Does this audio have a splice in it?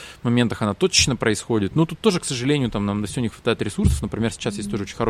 no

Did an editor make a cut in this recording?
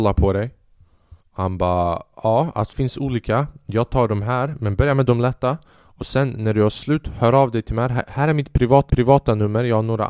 yes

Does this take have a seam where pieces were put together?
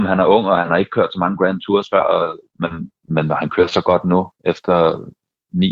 yes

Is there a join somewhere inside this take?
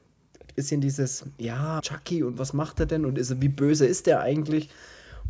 yes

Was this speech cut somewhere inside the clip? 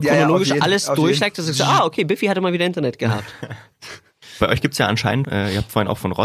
yes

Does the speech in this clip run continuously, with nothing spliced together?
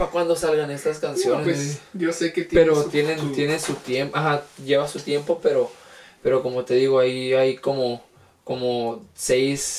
yes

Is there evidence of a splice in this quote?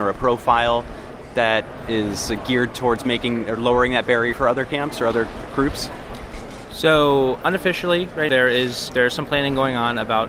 yes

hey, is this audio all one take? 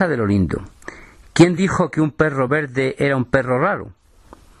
yes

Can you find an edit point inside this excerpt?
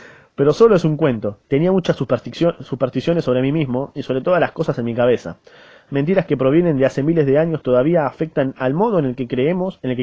yes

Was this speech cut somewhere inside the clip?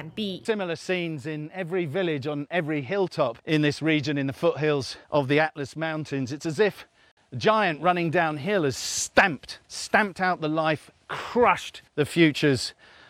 yes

